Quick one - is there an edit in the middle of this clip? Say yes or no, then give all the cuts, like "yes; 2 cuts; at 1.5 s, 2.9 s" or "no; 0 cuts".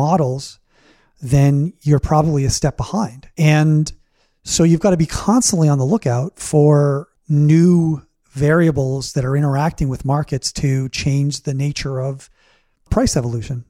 yes; 2 cuts; at 3.3 s, 7.1 s